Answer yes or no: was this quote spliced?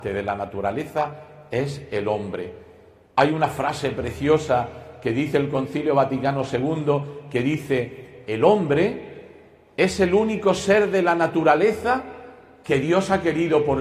no